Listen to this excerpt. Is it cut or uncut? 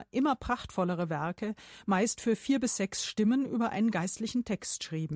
uncut